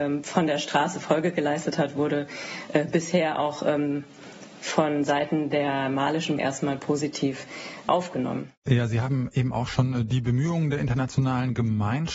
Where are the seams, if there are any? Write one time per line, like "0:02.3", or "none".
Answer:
0:06.4
0:08.6